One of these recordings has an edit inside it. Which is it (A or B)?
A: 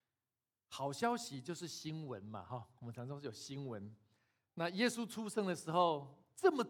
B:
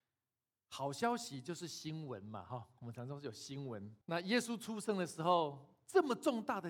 B